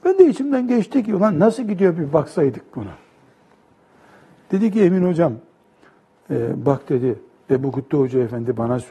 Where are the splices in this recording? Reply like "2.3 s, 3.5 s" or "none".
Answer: none